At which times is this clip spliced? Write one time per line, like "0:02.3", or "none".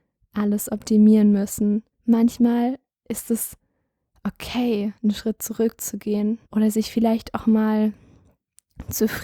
0:01.9
0:05.0
0:06.4